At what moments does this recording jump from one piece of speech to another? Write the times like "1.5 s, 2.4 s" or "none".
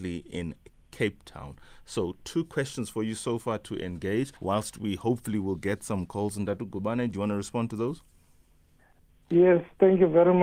4.4 s